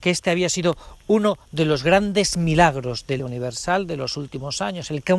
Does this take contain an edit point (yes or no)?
yes